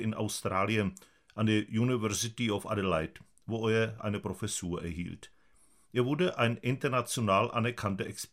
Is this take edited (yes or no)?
no